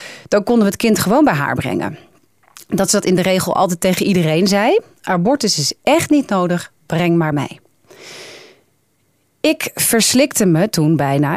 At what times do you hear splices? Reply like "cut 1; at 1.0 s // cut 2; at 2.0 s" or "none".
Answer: cut 1; at 7.3 s